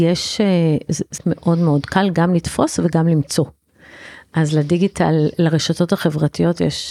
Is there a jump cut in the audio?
yes; 1 cut; at 1.2 s

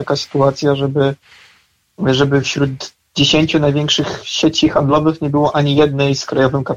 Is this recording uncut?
yes; 0 cuts

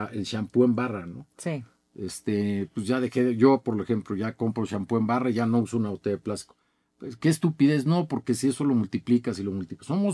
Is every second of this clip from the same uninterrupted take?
yes; 0 cuts

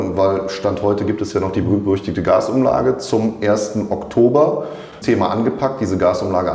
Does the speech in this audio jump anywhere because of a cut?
yes; 1 cut; at 5.0 s

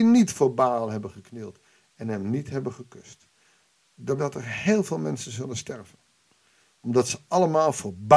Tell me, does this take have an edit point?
yes; 1 cut; at 4.2 s

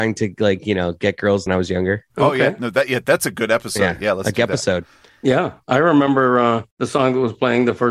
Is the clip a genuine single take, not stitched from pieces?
no; 2 cuts; at 1.5 s, 6.7 s

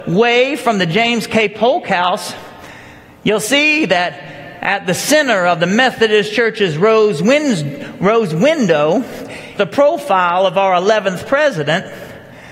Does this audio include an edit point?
yes; 1 cut; at 9.6 s

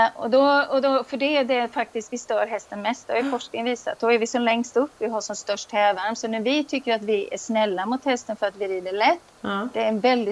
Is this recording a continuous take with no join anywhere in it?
yes; 0 cuts

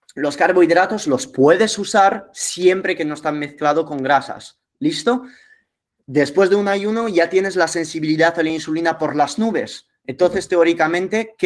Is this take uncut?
yes; 0 cuts

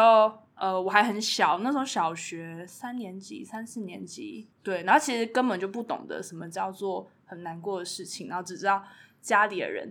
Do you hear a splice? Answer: yes; 1 cut; at 4.5 s

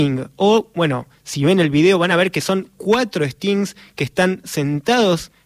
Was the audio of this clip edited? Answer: no; 0 cuts

